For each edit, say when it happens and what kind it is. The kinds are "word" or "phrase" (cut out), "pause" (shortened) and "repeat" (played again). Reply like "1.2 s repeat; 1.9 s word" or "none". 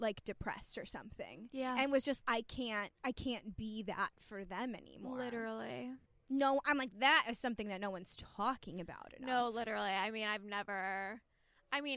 2.2 s word; 3.0 s pause; 6.1 s pause